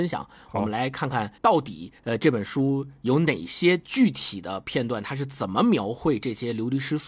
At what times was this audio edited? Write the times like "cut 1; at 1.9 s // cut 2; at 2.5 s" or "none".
cut 1; at 1.4 s // cut 2; at 2.0 s